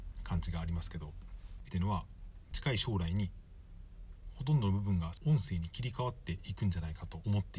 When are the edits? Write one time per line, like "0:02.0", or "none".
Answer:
0:01.7

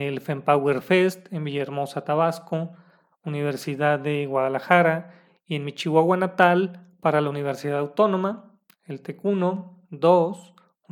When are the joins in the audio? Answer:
none

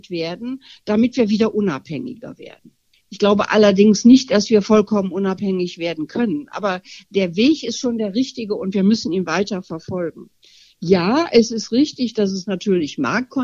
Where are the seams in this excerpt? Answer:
none

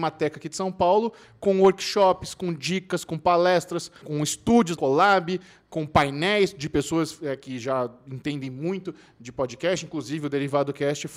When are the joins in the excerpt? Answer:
0:04.0
0:04.8

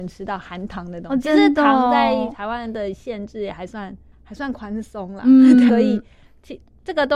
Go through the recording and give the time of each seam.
0:04.1
0:05.7

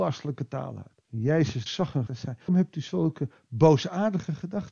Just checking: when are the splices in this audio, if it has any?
0:01.0
0:01.7
0:02.1
0:02.5

